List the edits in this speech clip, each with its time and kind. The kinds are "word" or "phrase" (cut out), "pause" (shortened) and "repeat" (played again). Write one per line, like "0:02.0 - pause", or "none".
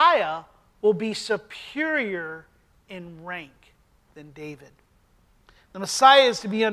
none